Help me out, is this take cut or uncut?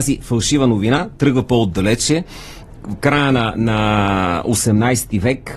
cut